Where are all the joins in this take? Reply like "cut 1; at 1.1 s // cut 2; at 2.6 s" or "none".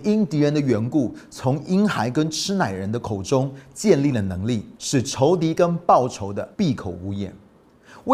cut 1; at 4.8 s // cut 2; at 6.5 s

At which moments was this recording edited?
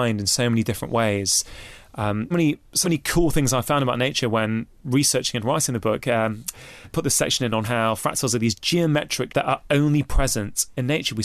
cut 1; at 2.3 s // cut 2; at 2.8 s // cut 3; at 4.7 s // cut 4; at 6.8 s // cut 5; at 7.6 s // cut 6; at 9.3 s

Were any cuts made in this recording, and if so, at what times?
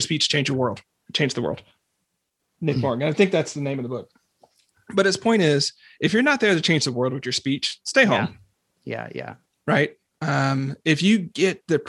none

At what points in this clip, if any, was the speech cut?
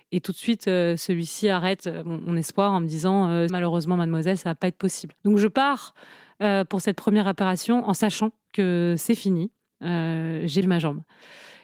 cut 1; at 3.5 s // cut 2; at 5.2 s // cut 3; at 10.6 s

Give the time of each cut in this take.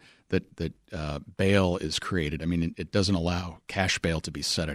cut 1; at 2.7 s // cut 2; at 3.6 s

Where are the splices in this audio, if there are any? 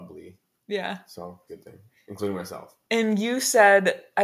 cut 1; at 1.5 s

